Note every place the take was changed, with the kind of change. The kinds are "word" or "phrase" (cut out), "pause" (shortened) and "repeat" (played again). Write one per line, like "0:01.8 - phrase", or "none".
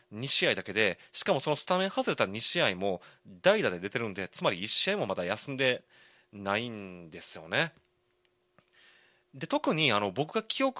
none